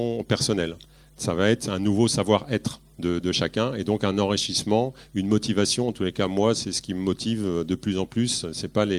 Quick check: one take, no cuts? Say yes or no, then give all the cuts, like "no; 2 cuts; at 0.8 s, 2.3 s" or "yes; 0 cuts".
yes; 0 cuts